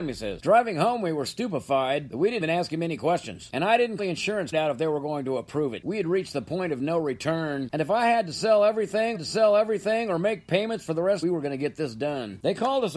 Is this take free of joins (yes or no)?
no